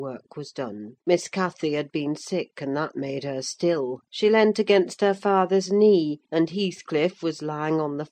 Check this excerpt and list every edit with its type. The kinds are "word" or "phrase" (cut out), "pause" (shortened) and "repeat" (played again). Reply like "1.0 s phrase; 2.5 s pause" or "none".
1.0 s pause; 4.1 s pause; 6.2 s pause